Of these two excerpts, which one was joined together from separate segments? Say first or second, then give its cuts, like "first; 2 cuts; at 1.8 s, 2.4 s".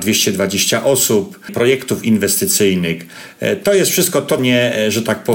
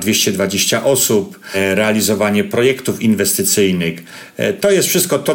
first; 2 cuts; at 1.5 s, 4.4 s